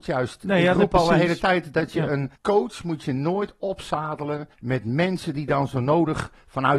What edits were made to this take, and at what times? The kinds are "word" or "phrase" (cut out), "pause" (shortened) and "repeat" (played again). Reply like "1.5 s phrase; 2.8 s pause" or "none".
2.4 s pause; 4.5 s pause